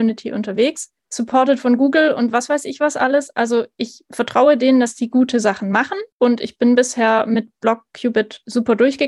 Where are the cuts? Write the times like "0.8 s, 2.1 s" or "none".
1.0 s, 6.1 s

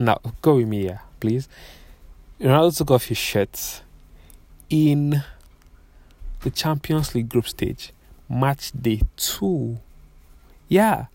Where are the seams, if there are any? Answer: none

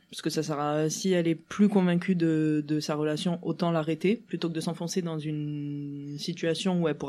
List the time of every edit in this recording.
none

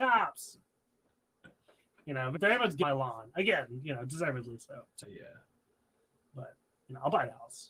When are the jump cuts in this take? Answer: 2.3 s, 2.8 s, 5.0 s

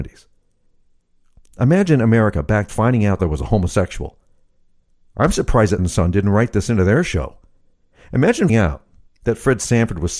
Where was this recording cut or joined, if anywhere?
2.7 s, 3.2 s, 5.8 s, 8.5 s

